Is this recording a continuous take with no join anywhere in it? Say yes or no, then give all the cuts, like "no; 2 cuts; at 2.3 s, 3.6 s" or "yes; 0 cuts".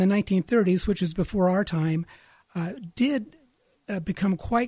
yes; 0 cuts